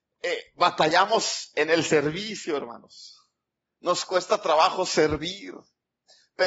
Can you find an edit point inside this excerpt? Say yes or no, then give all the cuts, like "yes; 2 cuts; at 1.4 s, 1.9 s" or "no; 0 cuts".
no; 0 cuts